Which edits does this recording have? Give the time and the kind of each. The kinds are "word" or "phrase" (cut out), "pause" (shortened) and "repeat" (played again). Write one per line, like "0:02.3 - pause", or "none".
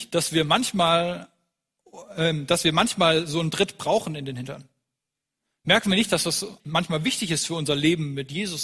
0:06.6 - word